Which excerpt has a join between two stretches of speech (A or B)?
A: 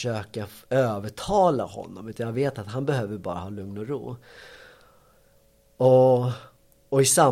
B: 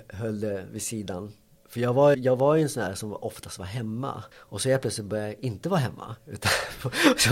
B